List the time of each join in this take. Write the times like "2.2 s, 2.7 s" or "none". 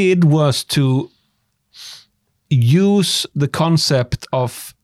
none